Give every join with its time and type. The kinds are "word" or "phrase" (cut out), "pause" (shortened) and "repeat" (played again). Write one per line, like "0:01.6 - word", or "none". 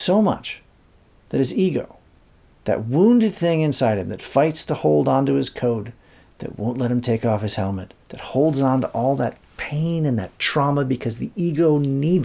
0:08.0 - pause